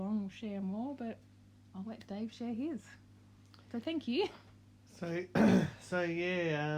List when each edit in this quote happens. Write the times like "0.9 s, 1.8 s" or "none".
none